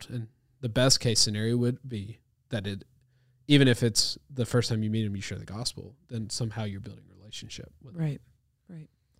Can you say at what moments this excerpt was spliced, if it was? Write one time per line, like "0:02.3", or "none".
none